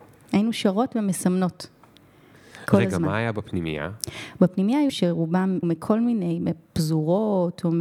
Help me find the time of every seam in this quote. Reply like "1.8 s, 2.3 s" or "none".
4.9 s, 5.6 s